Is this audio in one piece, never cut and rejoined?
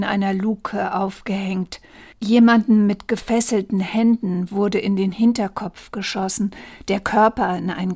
yes; 0 cuts

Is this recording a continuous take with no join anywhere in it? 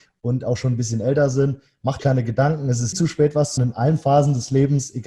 no; 3 cuts; at 2.0 s, 2.9 s, 3.6 s

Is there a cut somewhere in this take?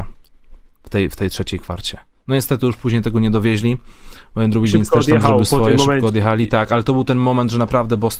no; 0 cuts

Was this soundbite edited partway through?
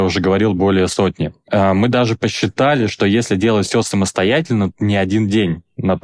yes; 1 cut; at 4.7 s

